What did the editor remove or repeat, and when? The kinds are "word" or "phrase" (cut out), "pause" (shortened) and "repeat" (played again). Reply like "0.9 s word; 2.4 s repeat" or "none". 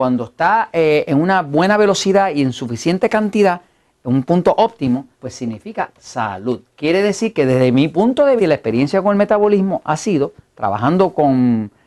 5.1 s pause; 6.7 s pause; 8.4 s word